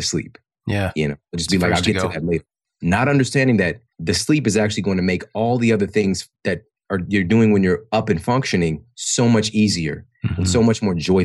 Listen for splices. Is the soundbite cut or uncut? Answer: cut